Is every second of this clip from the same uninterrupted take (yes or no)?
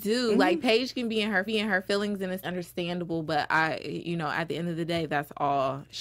no